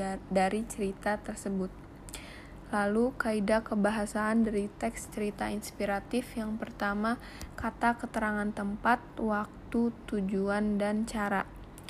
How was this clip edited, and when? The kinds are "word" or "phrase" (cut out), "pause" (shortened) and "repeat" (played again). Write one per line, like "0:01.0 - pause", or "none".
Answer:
none